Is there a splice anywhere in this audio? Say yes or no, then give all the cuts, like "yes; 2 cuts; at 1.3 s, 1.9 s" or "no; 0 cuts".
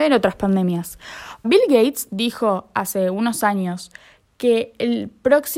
yes; 1 cut; at 1.4 s